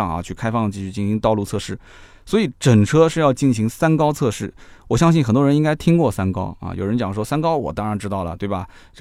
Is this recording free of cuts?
yes; 0 cuts

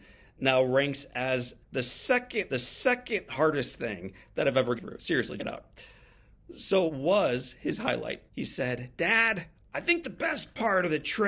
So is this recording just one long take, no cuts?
no; 7 cuts; at 1.6 s, 2.5 s, 4.8 s, 5.4 s, 6.9 s, 8.3 s, 9.5 s

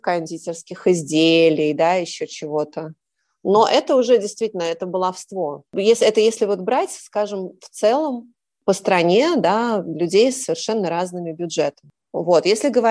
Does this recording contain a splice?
no; 0 cuts

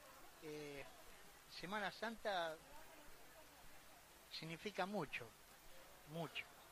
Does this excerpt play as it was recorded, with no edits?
yes; 0 cuts

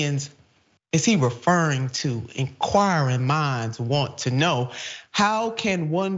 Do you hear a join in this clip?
no; 0 cuts

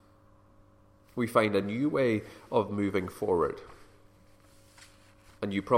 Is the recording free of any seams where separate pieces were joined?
yes; 0 cuts

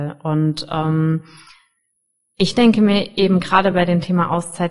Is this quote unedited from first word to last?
yes; 0 cuts

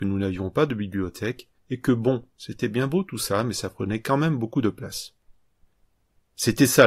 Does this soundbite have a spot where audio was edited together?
yes; 1 cut; at 1.6 s

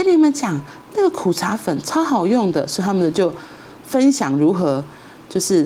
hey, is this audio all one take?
yes; 0 cuts

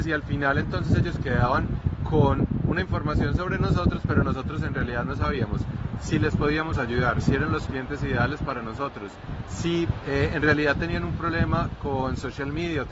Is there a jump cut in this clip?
no; 0 cuts

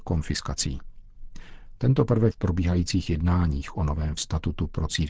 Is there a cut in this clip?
yes; 2 cuts; at 2.3 s, 4.2 s

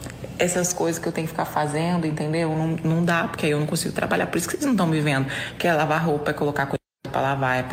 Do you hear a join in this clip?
no; 0 cuts

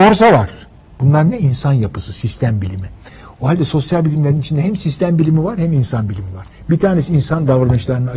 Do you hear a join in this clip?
no; 0 cuts

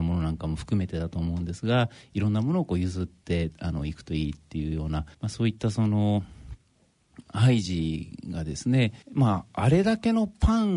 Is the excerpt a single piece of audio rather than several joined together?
no; 2 cuts; at 5.1 s, 9.0 s

